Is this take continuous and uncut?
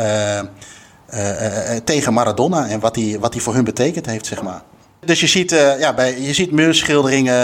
yes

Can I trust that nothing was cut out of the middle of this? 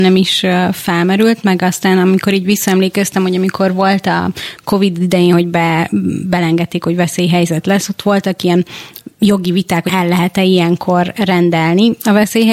no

